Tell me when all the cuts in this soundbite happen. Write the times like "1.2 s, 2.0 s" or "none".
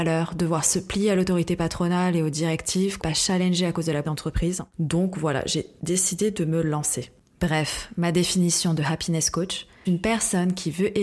3.0 s, 4.0 s, 9.9 s